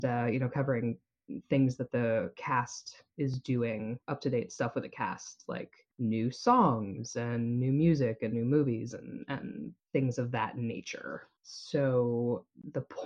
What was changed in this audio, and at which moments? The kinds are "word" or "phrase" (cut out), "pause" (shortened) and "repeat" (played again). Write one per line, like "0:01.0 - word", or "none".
0:04.0 - pause
0:05.9 - pause
0:09.8 - pause
0:11.4 - pause